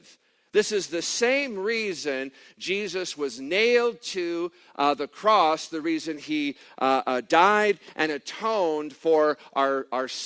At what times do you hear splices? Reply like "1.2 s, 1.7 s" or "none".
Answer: none